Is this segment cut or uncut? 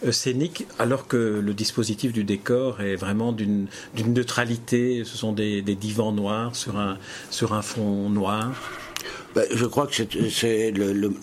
uncut